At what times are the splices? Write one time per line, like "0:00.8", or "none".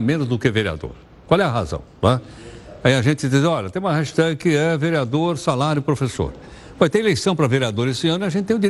none